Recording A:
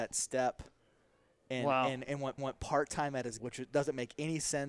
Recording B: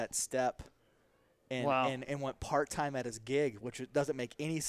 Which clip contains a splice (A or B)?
A